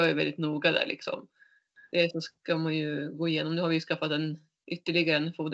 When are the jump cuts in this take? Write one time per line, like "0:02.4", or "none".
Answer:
none